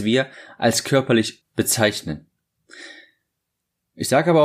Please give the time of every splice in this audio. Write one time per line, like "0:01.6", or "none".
0:01.4